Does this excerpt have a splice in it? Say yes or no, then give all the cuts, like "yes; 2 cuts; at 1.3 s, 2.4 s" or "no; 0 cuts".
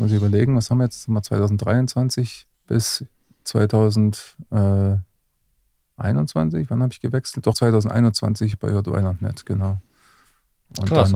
yes; 3 cuts; at 2.5 s, 7.5 s, 8.5 s